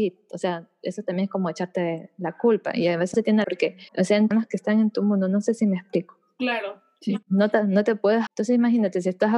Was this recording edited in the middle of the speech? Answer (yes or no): yes